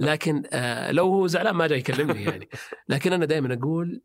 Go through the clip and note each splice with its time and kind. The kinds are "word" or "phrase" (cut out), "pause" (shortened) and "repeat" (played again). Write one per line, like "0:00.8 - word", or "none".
none